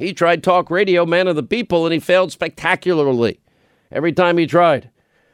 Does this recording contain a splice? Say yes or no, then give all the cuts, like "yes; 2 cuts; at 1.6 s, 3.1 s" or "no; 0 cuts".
no; 0 cuts